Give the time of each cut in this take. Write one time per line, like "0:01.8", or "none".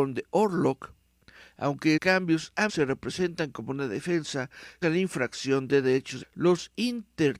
0:02.0
0:02.7
0:04.8
0:06.2